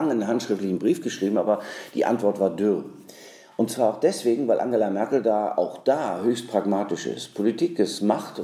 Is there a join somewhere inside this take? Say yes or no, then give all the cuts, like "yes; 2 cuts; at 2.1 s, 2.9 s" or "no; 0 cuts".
no; 0 cuts